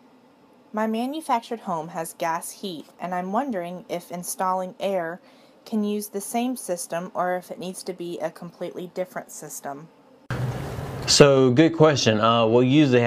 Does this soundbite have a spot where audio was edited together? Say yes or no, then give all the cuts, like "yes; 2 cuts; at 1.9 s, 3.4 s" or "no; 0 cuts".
no; 0 cuts